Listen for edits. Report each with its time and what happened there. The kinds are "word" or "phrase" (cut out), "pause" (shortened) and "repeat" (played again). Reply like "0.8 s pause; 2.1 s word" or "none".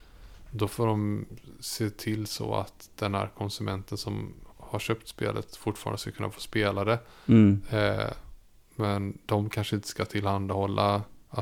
4.5 s pause